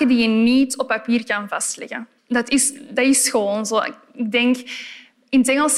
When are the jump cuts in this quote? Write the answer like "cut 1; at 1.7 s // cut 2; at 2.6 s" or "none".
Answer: cut 1; at 2.2 s